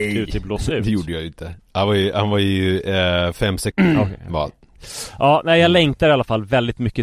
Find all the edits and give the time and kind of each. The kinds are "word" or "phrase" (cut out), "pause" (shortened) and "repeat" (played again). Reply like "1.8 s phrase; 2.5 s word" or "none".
3.7 s phrase